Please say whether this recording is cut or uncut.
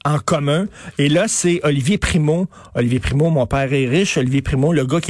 uncut